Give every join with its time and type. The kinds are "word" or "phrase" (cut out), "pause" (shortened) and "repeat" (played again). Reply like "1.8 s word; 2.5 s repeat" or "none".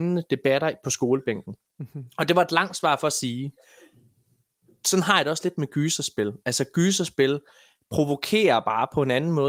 none